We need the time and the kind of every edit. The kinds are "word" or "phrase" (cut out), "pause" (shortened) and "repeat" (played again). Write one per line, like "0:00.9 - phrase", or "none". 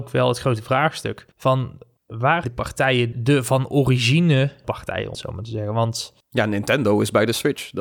0:01.3 - pause
0:02.4 - word
0:03.1 - word
0:04.6 - word
0:05.1 - word
0:06.2 - pause